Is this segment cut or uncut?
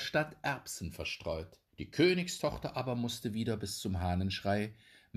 cut